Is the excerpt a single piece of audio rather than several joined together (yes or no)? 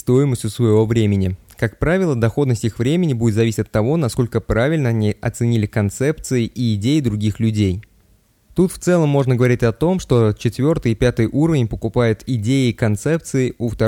yes